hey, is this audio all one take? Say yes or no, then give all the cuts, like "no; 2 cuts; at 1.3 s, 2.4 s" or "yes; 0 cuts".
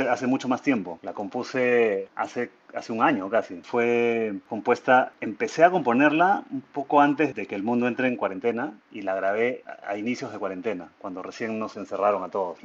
no; 1 cut; at 7.3 s